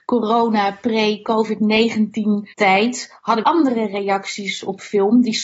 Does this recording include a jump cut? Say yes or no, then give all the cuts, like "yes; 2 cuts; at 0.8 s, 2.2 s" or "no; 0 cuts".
yes; 2 cuts; at 2.5 s, 3.4 s